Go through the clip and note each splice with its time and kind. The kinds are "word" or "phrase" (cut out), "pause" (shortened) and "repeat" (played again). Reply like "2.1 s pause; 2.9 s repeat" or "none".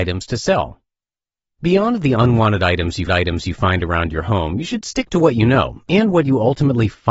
3.1 s repeat